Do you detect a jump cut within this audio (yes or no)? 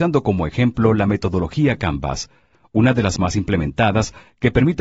yes